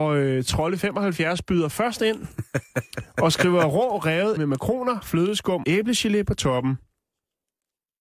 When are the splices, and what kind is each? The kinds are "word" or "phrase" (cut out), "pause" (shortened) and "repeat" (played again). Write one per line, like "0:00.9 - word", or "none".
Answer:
0:04.4 - word
0:05.6 - word